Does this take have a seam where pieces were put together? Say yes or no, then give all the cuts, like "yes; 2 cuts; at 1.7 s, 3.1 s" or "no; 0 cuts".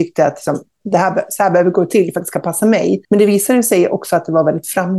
yes; 1 cut; at 3.0 s